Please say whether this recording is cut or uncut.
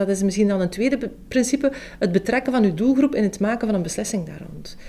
uncut